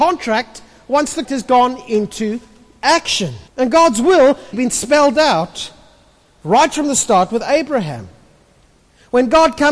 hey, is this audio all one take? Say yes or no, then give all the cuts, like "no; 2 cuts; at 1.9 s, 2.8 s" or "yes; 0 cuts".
no; 3 cuts; at 1.2 s, 3.5 s, 4.5 s